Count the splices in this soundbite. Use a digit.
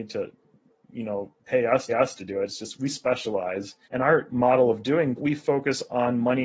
6